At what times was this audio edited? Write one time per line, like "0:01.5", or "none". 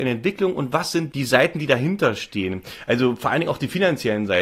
0:01.1